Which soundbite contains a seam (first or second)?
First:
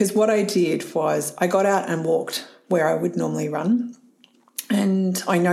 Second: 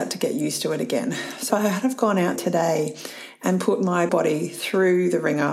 second